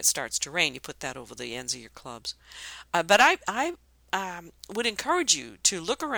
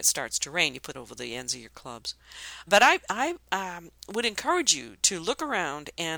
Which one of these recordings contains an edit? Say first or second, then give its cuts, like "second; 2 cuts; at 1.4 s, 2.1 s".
second; 3 cuts; at 0.9 s, 2.7 s, 3.4 s